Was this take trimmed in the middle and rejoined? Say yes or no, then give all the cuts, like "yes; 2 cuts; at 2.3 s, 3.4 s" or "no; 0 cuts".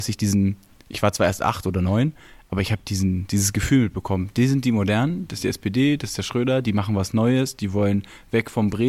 no; 0 cuts